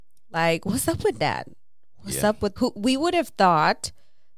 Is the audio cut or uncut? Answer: cut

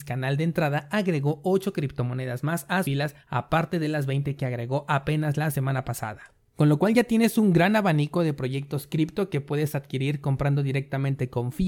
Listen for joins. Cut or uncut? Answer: cut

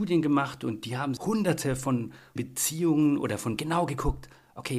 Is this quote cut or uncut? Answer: cut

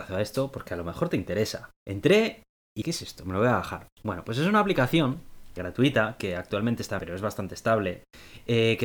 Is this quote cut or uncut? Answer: cut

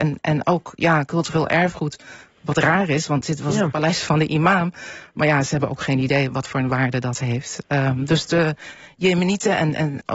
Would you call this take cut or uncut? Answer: uncut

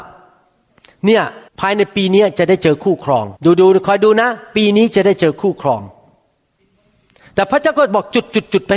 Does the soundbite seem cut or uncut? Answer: cut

